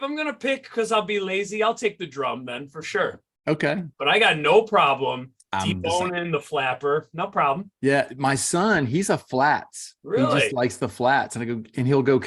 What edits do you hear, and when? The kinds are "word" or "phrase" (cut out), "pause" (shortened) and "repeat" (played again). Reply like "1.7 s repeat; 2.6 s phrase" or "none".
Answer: 3.9 s pause; 7.8 s pause; 10.0 s pause

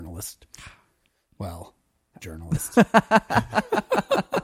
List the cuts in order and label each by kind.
2.2 s word

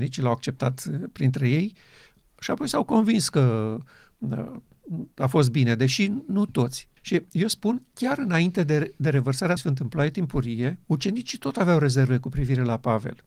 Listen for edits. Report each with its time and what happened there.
7.0 s pause; 9.6 s word; 10.8 s pause

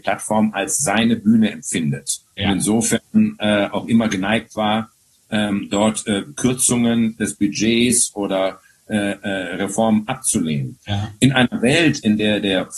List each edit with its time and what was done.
2.3 s pause

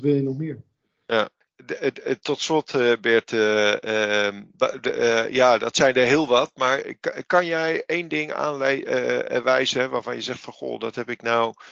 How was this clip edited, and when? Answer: none

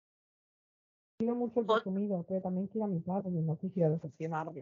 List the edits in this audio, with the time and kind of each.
none

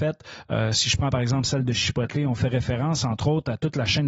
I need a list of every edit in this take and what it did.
none

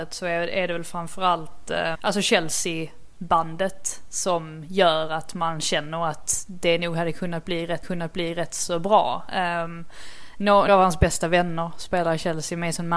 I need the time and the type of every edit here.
1.9 s word; 7.8 s repeat; 10.7 s word

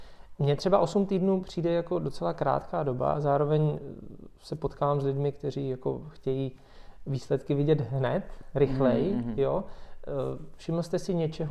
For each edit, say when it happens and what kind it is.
none

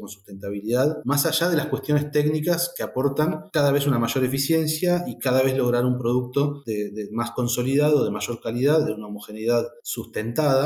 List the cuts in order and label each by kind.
none

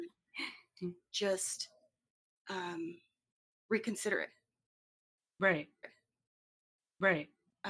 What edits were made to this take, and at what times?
5.8 s repeat

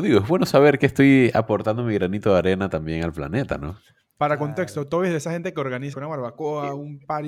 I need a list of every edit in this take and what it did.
5.9 s word

